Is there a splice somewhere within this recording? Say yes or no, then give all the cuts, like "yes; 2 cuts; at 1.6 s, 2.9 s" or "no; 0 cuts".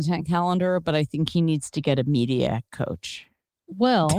no; 0 cuts